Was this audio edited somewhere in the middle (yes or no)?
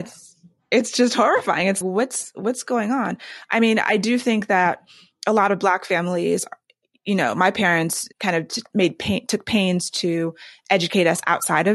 yes